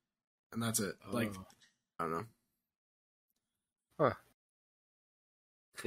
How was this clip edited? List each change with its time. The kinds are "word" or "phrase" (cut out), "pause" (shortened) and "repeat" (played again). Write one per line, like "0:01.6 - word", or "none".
0:02.0 - word